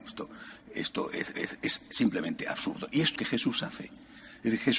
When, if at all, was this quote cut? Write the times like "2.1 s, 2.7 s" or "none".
1.3 s, 3.2 s